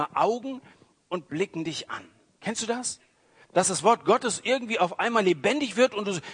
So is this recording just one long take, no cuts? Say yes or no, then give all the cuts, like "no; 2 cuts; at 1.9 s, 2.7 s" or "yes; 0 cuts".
yes; 0 cuts